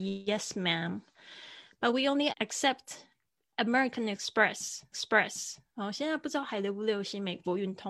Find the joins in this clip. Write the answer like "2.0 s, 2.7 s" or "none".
2.3 s, 4.9 s